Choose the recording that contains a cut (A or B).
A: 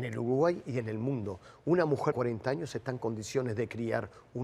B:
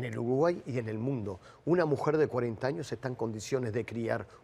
A